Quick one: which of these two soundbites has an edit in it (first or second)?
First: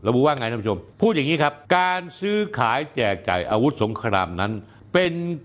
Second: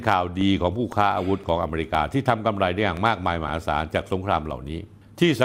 first